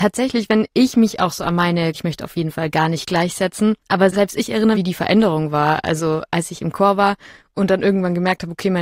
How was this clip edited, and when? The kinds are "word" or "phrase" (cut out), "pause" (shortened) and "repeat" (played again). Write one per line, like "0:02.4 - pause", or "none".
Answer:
0:01.9 - phrase
0:03.8 - pause
0:04.7 - phrase